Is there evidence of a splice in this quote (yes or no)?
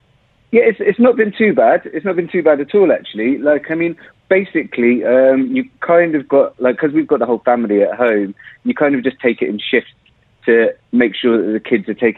no